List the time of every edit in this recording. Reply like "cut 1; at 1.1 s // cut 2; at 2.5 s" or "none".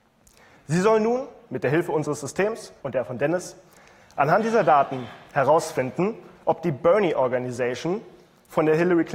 cut 1; at 2.8 s

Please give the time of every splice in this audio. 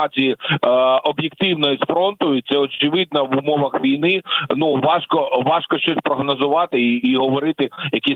none

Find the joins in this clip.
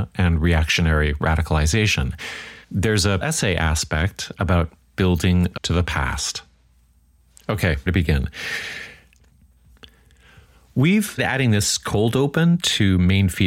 cut 1; at 2.6 s // cut 2; at 3.2 s // cut 3; at 4.8 s // cut 4; at 5.6 s // cut 5; at 7.9 s // cut 6; at 11.2 s

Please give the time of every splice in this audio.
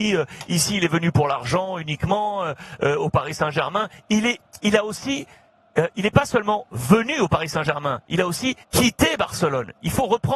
cut 1; at 8.6 s

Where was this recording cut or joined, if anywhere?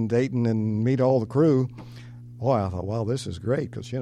none

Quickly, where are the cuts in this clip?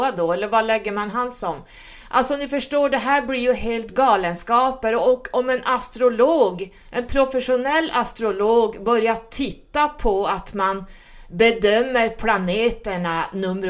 cut 1; at 6.8 s

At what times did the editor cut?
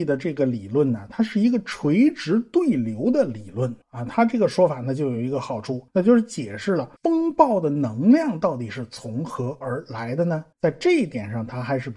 cut 1; at 3.8 s // cut 2; at 5.9 s // cut 3; at 7.0 s // cut 4; at 10.5 s

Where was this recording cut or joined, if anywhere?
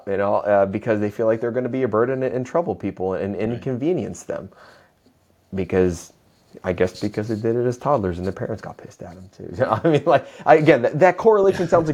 none

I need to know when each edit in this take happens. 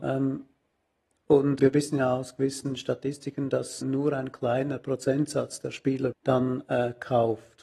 cut 1; at 1.6 s // cut 2; at 3.8 s // cut 3; at 6.1 s

